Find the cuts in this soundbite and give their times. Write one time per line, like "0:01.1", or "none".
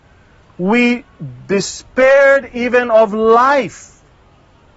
none